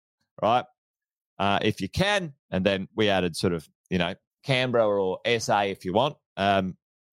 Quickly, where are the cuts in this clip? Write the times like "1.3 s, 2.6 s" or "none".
2.4 s, 2.9 s, 4.3 s

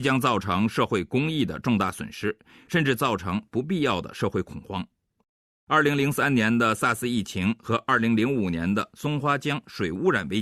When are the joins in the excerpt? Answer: none

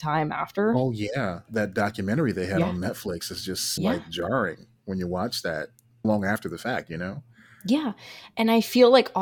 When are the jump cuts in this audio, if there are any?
1.5 s, 3.8 s, 6.0 s

